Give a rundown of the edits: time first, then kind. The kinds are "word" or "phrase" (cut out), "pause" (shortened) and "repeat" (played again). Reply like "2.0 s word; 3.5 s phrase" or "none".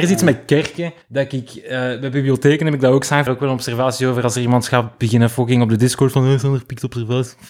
1.0 s pause; 3.3 s phrase